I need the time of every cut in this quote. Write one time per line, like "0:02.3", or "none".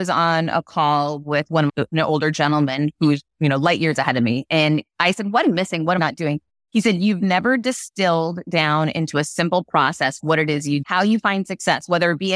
0:01.7
0:05.4
0:06.0
0:10.8